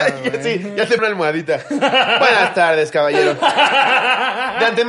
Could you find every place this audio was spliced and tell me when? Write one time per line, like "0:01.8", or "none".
0:01.0